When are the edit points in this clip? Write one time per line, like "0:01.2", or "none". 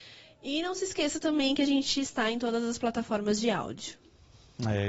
none

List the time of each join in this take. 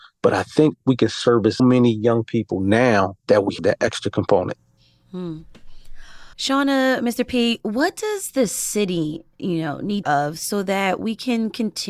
0:01.6
0:03.2
0:03.6
0:06.3
0:10.0

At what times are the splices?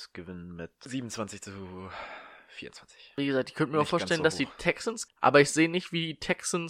0:05.1

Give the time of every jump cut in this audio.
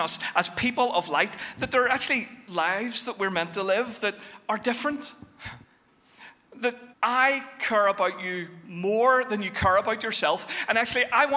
0:05.6
0:06.9

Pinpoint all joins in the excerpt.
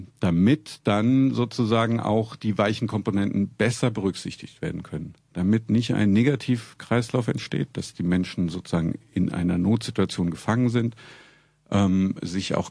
none

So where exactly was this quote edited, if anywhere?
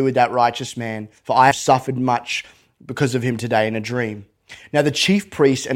0:01.2
0:01.5

